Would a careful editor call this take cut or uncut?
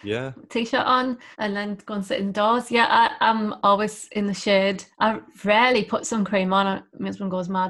cut